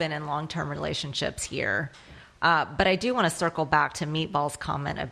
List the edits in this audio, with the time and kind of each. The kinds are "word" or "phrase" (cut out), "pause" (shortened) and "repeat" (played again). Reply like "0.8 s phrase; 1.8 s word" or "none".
none